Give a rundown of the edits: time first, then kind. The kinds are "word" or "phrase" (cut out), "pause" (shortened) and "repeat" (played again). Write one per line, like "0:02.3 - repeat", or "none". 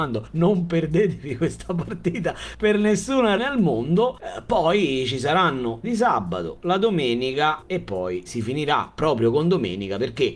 0:03.4 - word
0:05.8 - phrase
0:08.3 - word